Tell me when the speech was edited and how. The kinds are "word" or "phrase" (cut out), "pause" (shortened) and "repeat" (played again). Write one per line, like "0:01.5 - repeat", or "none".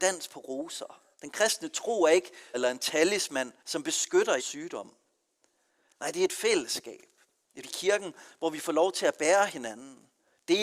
0:01.1 - pause
0:02.5 - phrase
0:03.6 - pause
0:04.4 - word
0:07.6 - word

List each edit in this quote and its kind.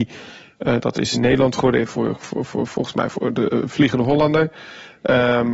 0:01.1 - phrase

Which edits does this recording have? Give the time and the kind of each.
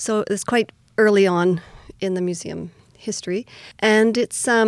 0:03.7 - pause

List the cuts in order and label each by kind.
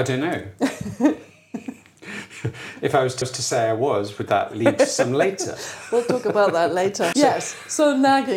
0:03.2 - repeat
0:07.1 - word

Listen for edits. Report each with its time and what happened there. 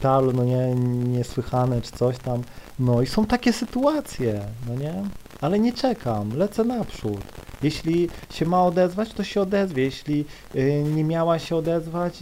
none

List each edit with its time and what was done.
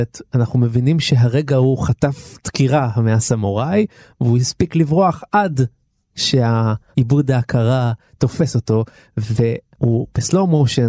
none

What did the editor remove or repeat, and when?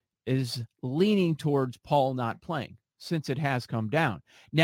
none

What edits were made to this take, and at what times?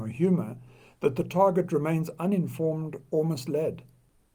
none

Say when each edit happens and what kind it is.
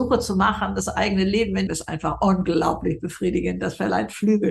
0:01.7 - phrase

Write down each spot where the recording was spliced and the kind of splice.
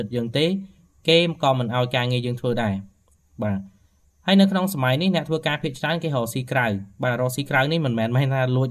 none

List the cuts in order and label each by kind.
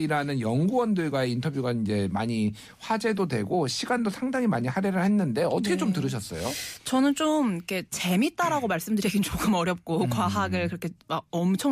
none

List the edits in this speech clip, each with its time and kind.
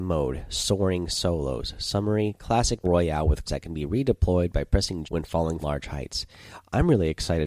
0:02.8 - word
0:03.5 - word
0:05.0 - word
0:05.6 - word

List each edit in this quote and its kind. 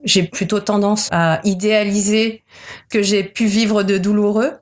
0:01.1 - word
0:02.9 - word

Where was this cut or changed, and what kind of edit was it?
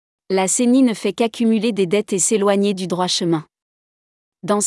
none

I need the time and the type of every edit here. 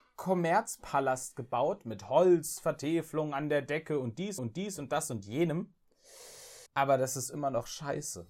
0:04.4 - repeat
0:06.7 - pause

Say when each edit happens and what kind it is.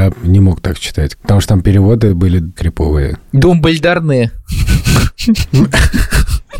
0:02.6 - word

